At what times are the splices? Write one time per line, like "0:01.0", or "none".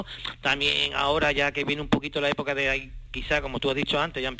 none